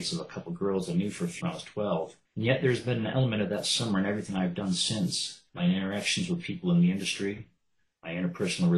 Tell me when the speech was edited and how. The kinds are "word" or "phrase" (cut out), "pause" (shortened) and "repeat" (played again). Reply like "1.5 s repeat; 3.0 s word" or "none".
1.4 s word; 2.2 s pause; 5.5 s pause